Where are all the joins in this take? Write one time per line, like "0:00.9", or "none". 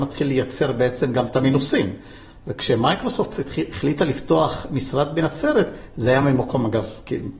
none